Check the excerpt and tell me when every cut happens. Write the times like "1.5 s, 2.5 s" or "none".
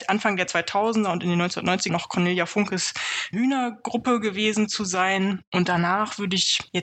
1.9 s, 3.3 s